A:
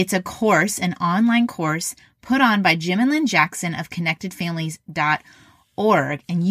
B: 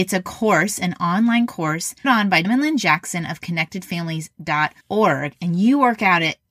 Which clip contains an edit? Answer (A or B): B